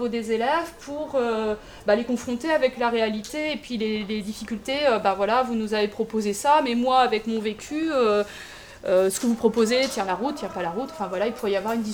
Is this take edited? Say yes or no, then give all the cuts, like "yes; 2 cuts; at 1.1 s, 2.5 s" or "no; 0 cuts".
no; 0 cuts